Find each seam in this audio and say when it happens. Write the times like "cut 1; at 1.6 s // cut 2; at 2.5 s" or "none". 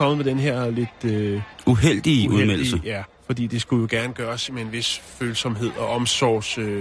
cut 1; at 3.1 s

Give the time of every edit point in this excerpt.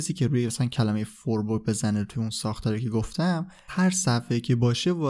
cut 1; at 3.7 s

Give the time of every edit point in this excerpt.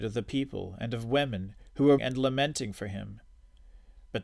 cut 1; at 2.0 s

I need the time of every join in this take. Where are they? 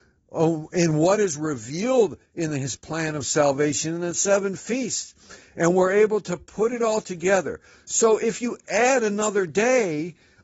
none

